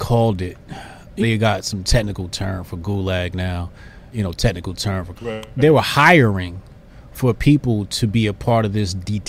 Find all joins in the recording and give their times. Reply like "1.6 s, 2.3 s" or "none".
1.2 s, 4.1 s, 5.2 s